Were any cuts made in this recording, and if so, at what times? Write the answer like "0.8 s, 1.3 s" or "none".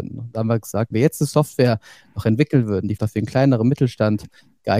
0.9 s, 3.0 s

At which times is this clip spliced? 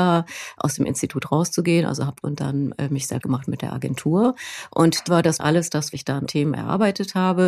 2.2 s, 3.2 s, 5.1 s, 5.4 s, 5.9 s, 6.3 s

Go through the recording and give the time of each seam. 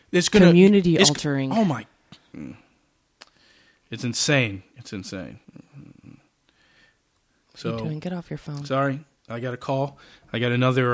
5.4 s

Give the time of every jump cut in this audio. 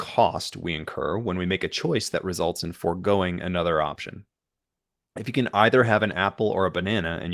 none

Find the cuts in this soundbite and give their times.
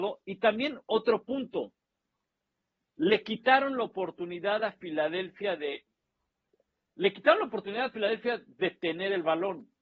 none

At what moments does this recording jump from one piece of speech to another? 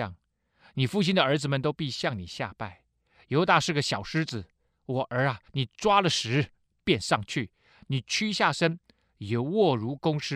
5.5 s

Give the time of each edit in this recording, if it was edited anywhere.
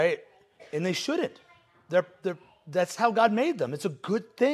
none

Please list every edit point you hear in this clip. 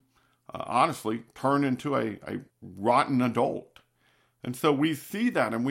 2.5 s

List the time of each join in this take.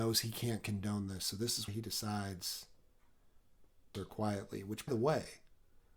1.7 s, 3.9 s, 4.9 s

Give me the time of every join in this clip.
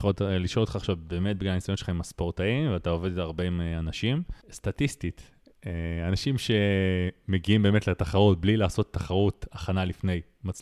4.4 s

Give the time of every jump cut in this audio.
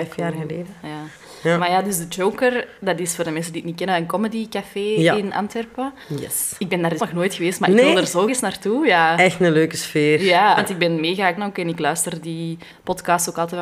7.0 s, 8.3 s, 10.6 s, 11.4 s

